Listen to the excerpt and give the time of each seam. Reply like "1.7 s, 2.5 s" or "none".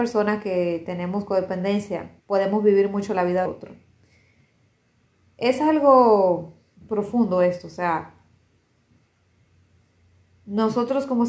2.2 s, 3.5 s, 6.8 s